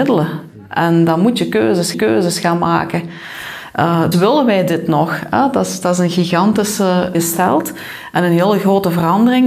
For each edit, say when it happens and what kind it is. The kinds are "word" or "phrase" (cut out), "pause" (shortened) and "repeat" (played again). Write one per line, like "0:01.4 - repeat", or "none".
0:01.9 - repeat
0:04.1 - word
0:07.1 - phrase

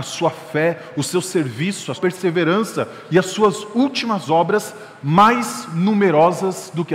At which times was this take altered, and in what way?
0:01.9 - word

